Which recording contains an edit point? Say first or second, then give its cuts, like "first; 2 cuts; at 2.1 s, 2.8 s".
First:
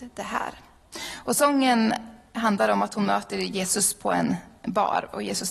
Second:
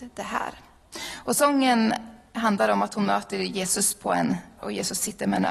second; 1 cut; at 4.6 s